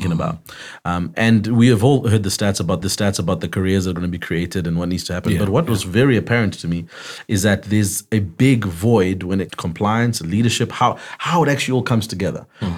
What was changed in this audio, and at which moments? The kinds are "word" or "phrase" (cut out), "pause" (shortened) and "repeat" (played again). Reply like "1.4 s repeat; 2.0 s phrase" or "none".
2.8 s repeat; 9.5 s phrase